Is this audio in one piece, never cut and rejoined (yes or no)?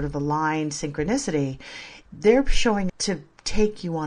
no